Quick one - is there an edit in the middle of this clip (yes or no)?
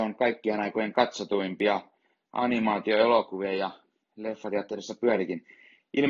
no